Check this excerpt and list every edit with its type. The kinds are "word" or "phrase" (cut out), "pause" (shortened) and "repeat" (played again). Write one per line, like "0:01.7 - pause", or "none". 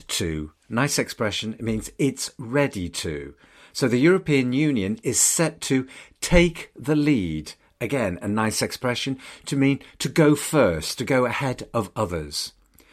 none